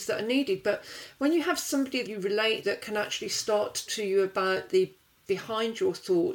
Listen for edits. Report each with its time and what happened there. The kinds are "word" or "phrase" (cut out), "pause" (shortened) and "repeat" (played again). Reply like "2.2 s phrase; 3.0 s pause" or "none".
2.0 s word; 2.6 s word; 3.9 s word; 5.3 s word